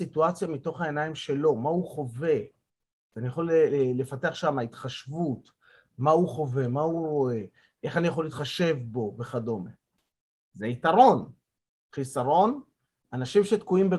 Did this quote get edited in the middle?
no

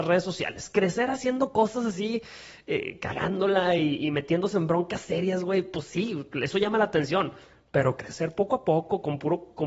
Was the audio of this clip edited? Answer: no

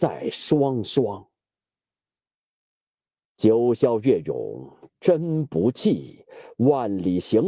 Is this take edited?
no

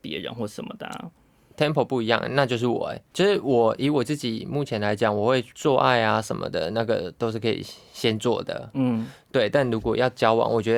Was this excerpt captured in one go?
yes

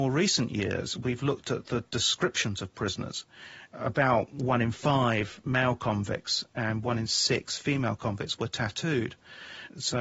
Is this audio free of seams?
yes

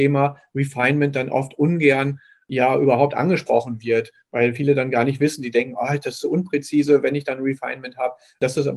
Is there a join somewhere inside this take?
no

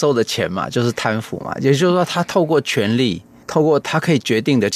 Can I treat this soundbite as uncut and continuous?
yes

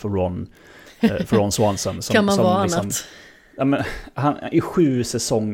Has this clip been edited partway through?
no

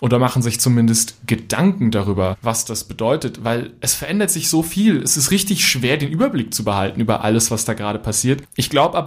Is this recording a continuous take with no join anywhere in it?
yes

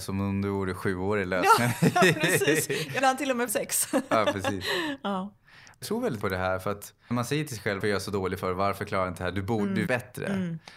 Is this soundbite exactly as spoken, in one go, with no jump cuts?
no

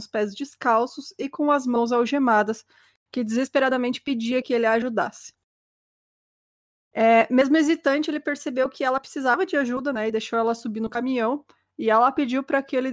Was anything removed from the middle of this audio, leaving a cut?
no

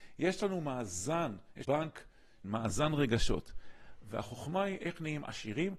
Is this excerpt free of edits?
no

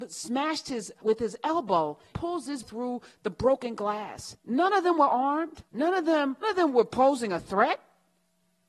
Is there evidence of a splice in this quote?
yes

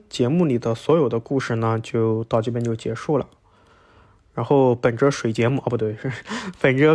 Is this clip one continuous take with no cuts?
yes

